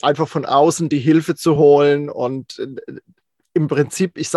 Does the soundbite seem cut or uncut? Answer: uncut